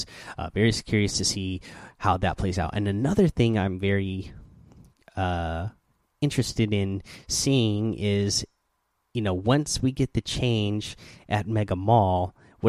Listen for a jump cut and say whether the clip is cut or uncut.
uncut